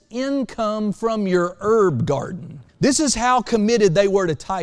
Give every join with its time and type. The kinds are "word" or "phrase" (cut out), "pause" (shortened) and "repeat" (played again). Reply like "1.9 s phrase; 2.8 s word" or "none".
2.7 s pause